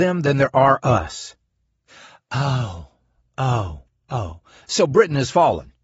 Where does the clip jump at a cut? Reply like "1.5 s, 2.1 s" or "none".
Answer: 3.9 s